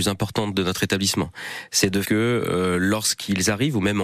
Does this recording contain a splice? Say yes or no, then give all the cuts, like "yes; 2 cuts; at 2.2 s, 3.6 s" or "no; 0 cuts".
yes; 1 cut; at 2.0 s